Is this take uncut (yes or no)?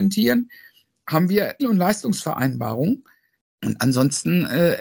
no